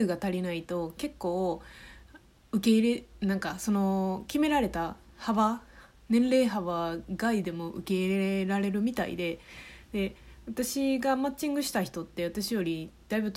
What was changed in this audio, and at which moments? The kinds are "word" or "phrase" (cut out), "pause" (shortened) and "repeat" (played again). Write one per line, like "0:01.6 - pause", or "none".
none